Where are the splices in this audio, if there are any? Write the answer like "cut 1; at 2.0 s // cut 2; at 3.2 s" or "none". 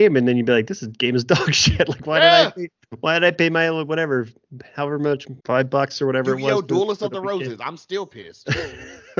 cut 1; at 5.4 s